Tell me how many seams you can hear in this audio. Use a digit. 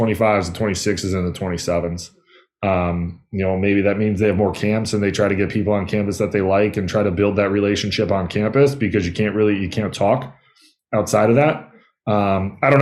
0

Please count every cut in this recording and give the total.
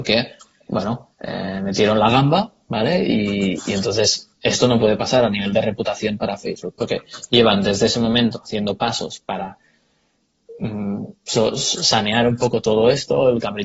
1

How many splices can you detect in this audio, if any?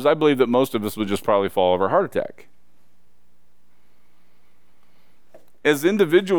0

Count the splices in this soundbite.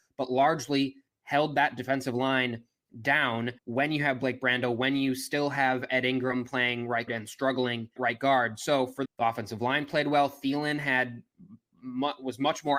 5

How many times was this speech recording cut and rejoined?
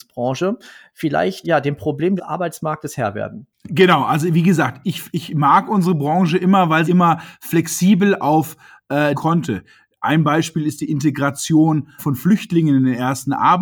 7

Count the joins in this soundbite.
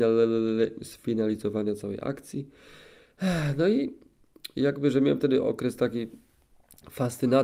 0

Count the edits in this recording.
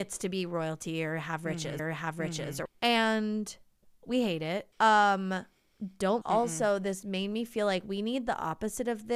5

